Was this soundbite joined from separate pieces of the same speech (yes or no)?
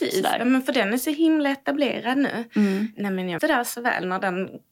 yes